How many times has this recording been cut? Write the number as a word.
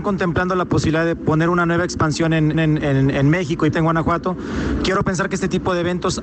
two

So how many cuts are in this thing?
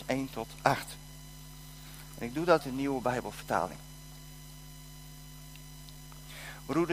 one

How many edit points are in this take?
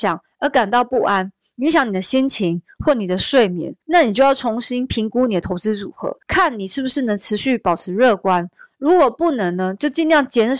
two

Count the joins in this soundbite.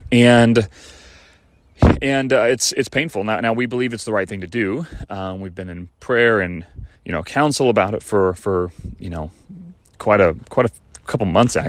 one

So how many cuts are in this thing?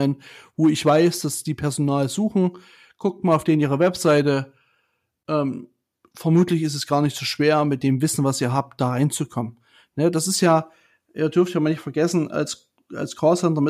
zero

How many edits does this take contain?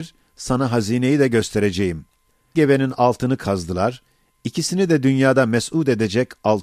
one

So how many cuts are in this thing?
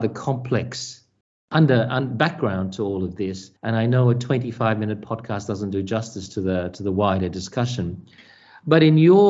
one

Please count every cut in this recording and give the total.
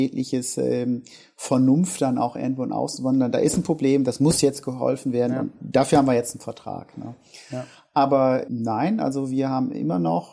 one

